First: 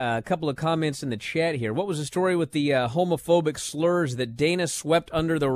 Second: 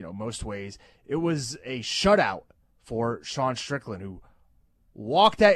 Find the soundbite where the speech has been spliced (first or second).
second